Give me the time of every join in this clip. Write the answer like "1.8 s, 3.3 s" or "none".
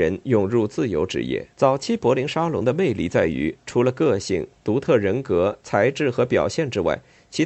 1.5 s

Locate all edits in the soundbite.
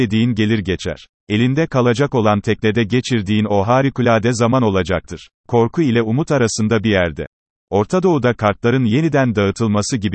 5.4 s, 7.5 s

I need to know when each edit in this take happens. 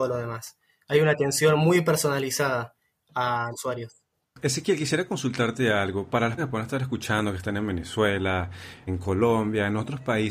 3.5 s, 4.1 s, 6.4 s, 8.9 s

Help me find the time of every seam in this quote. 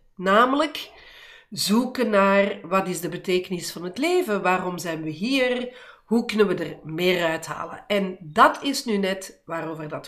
none

